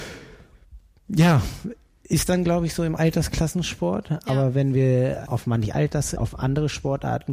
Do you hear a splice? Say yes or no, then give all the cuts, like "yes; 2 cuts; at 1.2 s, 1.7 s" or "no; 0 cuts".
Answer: yes; 3 cuts; at 5.3 s, 5.7 s, 6.2 s